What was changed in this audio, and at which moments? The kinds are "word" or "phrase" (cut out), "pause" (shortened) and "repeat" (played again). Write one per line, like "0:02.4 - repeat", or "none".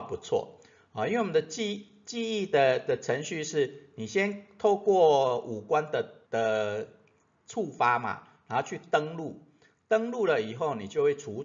0:06.2 - pause

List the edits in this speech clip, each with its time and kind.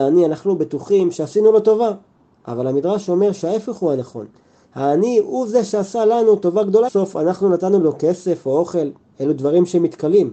0:06.9 - phrase

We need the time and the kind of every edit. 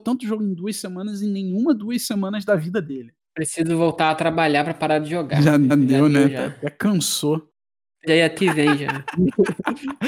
0:05.7 - repeat
0:08.1 - word
0:08.4 - word

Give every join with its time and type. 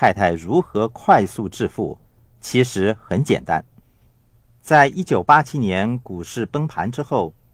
none

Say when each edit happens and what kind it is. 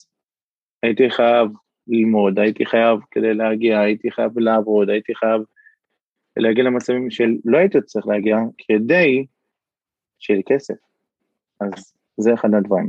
none

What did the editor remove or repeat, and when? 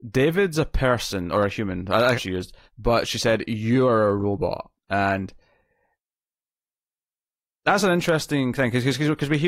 0:02.1 - phrase
0:02.7 - pause
0:04.8 - pause

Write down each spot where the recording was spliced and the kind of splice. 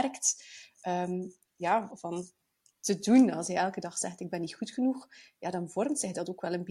0:01.9 - word

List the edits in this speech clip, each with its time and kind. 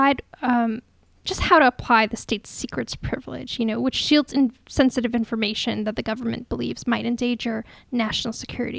none

